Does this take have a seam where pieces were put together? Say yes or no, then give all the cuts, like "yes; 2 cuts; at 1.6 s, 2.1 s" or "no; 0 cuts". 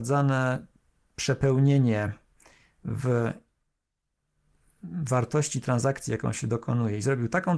no; 0 cuts